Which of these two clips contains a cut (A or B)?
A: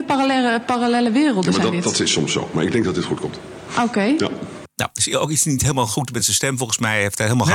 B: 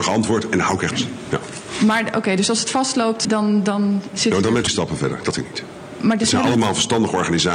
B